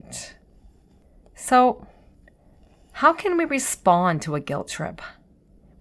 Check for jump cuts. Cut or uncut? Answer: uncut